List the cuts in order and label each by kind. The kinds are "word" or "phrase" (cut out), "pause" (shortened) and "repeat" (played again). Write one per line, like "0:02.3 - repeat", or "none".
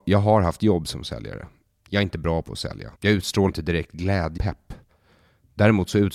0:02.9 - pause
0:03.5 - word
0:04.4 - word